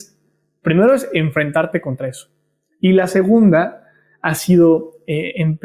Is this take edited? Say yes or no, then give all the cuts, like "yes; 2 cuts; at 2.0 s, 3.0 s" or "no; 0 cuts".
no; 0 cuts